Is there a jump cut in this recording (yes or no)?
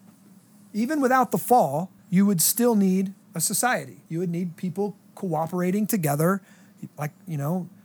yes